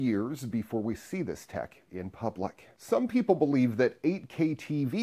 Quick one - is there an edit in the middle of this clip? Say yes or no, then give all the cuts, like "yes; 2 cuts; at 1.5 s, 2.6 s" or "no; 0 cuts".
no; 0 cuts